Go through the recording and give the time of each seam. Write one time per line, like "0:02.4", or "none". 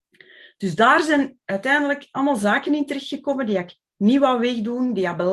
none